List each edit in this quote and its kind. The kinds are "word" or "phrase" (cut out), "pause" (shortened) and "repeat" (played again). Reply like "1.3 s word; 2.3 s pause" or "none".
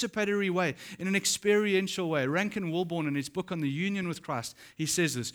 none